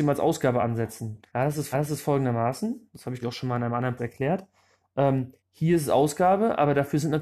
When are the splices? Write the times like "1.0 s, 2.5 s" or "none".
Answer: 1.3 s, 1.7 s, 3.2 s, 4.0 s, 5.4 s